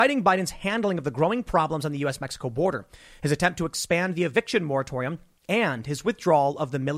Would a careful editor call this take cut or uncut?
uncut